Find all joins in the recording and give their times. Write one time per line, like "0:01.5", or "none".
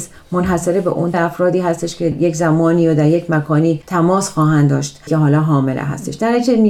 0:01.1
0:02.1
0:05.1